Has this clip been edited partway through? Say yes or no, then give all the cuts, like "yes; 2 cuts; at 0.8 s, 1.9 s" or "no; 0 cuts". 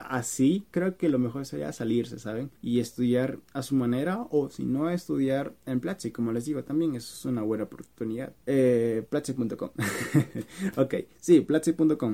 yes; 4 cuts; at 2.6 s, 3.4 s, 5.6 s, 8.4 s